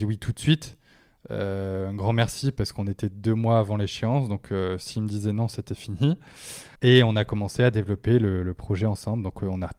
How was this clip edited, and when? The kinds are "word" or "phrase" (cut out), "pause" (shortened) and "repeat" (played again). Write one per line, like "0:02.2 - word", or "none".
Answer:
0:06.7 - pause